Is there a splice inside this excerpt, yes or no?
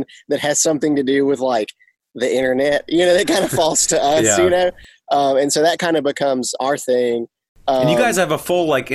no